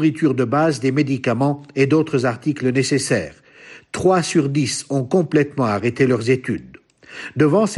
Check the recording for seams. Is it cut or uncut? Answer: uncut